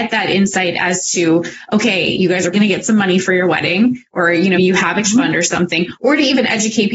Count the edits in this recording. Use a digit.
3